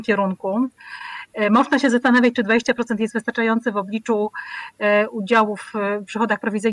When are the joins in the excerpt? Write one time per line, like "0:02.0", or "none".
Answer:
none